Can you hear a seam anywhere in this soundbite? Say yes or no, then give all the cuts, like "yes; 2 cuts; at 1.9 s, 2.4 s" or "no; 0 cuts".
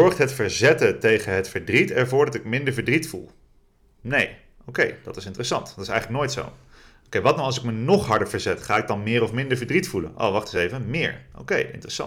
no; 0 cuts